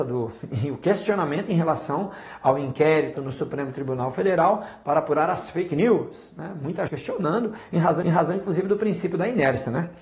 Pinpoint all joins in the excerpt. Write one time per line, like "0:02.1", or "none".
0:03.1
0:06.9
0:08.0